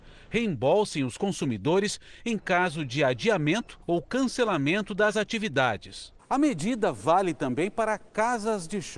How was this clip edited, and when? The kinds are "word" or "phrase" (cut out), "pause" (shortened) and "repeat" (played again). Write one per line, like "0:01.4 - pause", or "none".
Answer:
0:03.8 - pause